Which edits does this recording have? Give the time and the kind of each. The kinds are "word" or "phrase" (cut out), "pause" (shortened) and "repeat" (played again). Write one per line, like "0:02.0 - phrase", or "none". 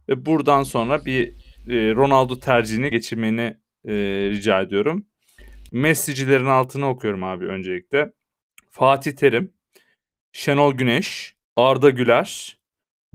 0:02.9 - word
0:11.4 - pause